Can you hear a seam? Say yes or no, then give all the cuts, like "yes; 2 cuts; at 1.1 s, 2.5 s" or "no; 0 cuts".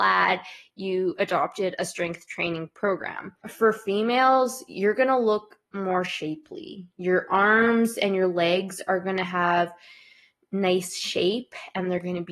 yes; 1 cut; at 3.4 s